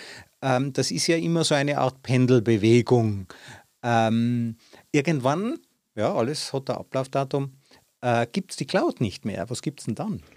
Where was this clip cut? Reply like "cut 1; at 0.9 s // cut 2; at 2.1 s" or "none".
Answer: none

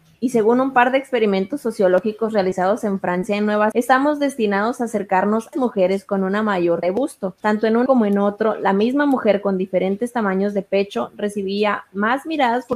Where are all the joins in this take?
cut 1; at 3.7 s // cut 2; at 5.5 s // cut 3; at 6.8 s // cut 4; at 7.9 s

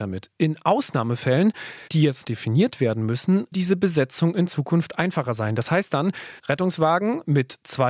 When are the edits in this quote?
cut 1; at 1.9 s // cut 2; at 2.2 s // cut 3; at 3.5 s // cut 4; at 6.4 s

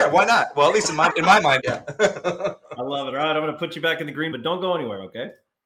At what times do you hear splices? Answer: cut 1; at 1.1 s // cut 2; at 1.6 s // cut 3; at 4.3 s

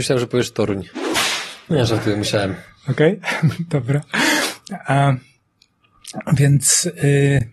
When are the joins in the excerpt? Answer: none

